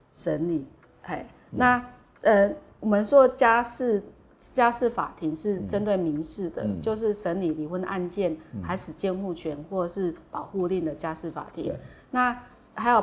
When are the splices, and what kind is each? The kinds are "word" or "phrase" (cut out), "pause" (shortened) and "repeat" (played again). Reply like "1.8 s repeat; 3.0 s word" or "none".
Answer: none